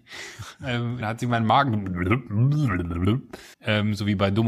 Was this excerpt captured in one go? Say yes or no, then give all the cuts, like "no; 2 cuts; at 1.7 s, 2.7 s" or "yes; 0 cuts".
no; 2 cuts; at 1.0 s, 3.5 s